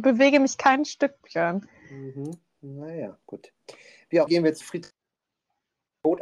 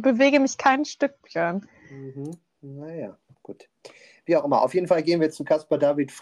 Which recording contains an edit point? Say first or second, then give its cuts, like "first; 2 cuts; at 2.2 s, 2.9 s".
first; 3 cuts; at 3.2 s, 4.3 s, 4.6 s